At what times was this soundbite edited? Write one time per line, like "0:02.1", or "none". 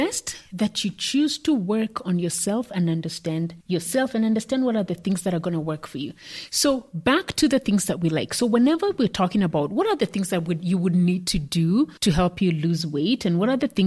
0:03.6
0:12.0